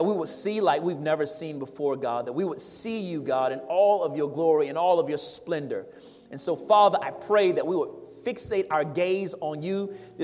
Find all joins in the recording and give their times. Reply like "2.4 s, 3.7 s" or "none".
none